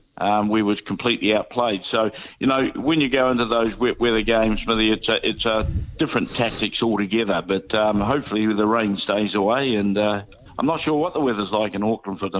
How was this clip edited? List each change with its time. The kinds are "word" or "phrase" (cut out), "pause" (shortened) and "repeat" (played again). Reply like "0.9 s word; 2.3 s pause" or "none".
none